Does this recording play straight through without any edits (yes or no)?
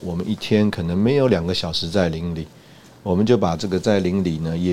yes